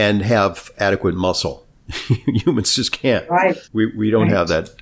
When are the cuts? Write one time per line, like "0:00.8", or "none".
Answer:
0:03.6